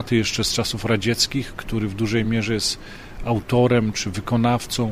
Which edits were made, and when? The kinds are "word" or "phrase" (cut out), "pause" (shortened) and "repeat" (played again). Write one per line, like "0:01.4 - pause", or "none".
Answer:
none